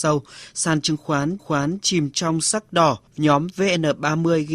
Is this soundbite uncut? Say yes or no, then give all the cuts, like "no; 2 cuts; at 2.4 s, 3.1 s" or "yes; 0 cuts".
no; 2 cuts; at 1.4 s, 3.1 s